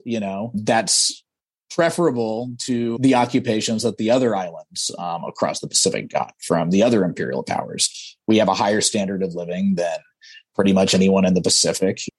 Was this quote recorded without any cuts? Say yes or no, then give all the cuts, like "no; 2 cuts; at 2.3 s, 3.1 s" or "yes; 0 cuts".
yes; 0 cuts